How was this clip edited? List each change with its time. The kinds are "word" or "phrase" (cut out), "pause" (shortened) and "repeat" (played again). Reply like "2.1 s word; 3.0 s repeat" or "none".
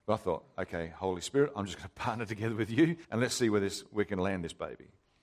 3.0 s pause